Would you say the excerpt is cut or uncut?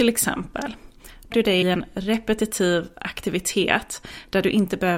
cut